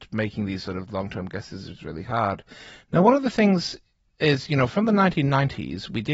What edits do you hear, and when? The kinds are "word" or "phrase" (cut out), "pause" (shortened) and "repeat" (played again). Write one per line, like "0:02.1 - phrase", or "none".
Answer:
none